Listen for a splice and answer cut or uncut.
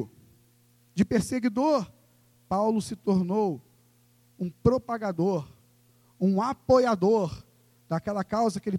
uncut